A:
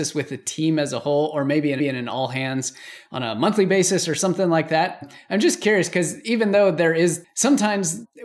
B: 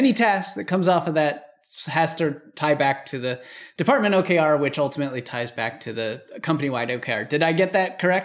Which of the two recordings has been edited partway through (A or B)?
A